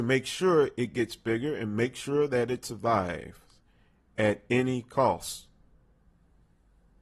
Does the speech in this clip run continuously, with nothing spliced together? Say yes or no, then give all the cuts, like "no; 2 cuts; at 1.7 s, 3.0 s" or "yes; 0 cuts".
yes; 0 cuts